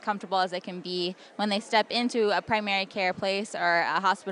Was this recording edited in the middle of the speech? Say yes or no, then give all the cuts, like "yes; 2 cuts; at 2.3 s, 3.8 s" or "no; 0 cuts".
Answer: no; 0 cuts